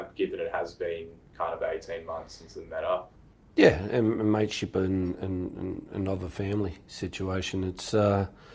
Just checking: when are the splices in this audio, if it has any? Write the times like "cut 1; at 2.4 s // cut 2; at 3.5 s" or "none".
none